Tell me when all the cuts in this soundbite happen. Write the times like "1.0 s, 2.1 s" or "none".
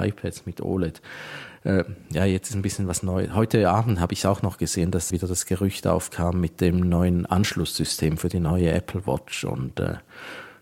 5.1 s